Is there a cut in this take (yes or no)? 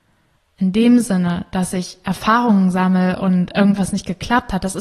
no